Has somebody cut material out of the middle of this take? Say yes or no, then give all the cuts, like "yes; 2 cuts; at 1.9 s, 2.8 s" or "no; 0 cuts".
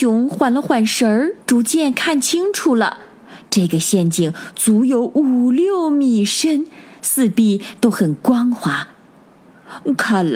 yes; 1 cut; at 1.4 s